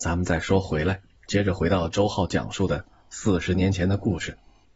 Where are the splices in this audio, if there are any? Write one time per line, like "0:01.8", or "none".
0:01.2